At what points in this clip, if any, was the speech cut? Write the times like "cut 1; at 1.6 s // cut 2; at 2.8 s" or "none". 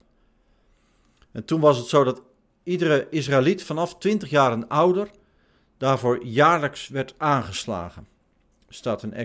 none